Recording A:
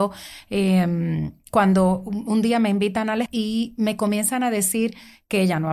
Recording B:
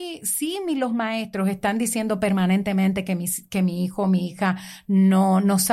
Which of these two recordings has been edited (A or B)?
A